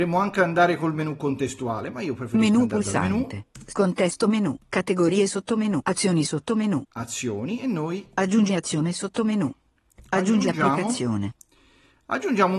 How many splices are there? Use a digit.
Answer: 0